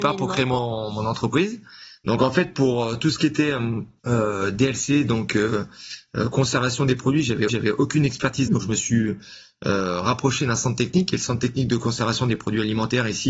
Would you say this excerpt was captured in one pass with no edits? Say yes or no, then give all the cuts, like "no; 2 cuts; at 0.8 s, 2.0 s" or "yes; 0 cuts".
no; 3 cuts; at 4.0 s, 7.5 s, 8.5 s